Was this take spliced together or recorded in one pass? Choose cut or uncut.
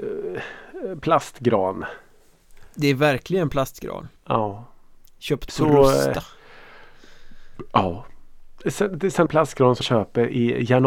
cut